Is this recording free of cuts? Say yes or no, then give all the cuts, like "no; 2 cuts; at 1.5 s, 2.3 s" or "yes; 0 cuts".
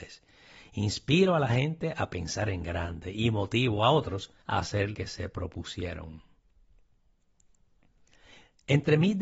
no; 2 cuts; at 4.4 s, 4.9 s